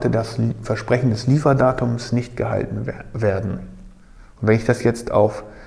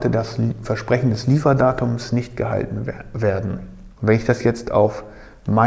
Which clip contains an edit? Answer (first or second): second